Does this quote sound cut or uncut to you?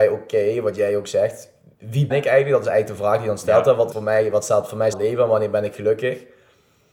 cut